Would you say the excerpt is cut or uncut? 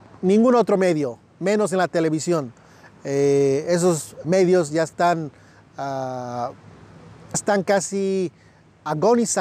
cut